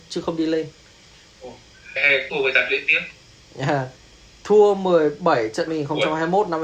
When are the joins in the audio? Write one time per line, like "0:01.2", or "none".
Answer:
0:02.0
0:02.3
0:04.0
0:05.7